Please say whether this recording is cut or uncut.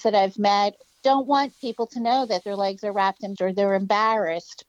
cut